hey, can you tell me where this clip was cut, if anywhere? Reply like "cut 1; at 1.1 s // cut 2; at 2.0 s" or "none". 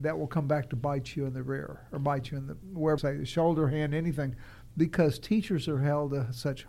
cut 1; at 3.0 s